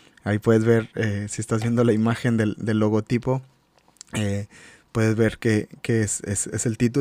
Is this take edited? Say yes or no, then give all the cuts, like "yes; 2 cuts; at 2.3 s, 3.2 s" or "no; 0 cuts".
no; 0 cuts